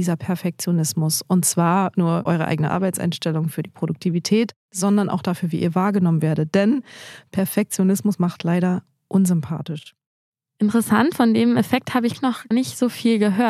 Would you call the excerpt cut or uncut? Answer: cut